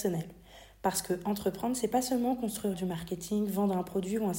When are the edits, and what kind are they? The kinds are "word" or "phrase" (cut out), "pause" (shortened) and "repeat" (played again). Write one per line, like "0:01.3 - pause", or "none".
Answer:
0:02.7 - phrase